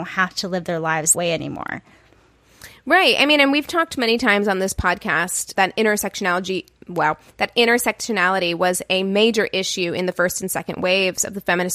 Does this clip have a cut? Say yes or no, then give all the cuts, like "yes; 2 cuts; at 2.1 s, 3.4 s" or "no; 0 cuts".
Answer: yes; 2 cuts; at 1.1 s, 5.6 s